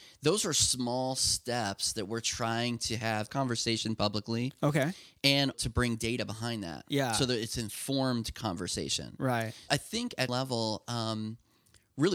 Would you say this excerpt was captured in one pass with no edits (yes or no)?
no